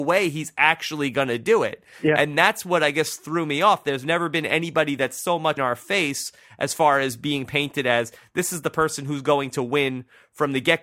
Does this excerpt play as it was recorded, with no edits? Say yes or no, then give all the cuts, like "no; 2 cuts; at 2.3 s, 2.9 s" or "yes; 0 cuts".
no; 1 cut; at 5.6 s